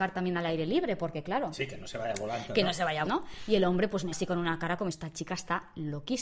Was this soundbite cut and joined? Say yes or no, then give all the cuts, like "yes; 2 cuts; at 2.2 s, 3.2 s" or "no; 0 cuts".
yes; 3 cuts; at 3.1 s, 4.1 s, 4.9 s